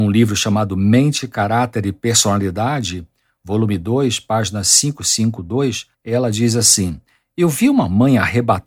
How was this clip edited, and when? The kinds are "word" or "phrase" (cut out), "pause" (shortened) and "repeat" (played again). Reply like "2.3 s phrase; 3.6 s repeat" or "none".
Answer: 5.9 s pause